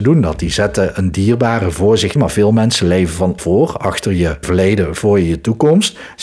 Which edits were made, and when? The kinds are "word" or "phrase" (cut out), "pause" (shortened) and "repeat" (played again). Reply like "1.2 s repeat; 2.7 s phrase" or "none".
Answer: 2.2 s phrase; 3.4 s phrase; 4.4 s word